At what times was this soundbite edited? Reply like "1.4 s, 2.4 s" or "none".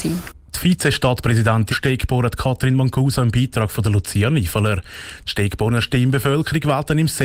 1.7 s